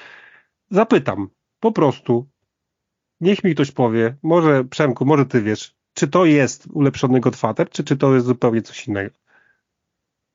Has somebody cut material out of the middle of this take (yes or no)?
yes